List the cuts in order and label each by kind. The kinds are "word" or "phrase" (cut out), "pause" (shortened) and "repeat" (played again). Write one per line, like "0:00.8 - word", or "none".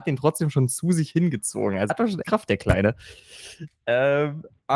0:01.9 - word
0:02.2 - word